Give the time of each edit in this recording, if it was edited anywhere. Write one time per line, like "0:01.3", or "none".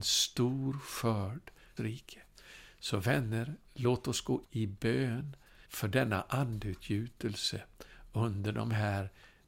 0:01.8
0:04.4
0:05.6